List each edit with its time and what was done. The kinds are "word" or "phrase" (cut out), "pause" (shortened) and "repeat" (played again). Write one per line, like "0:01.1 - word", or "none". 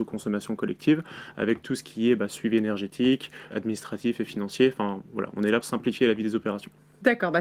0:03.5 - word
0:05.6 - word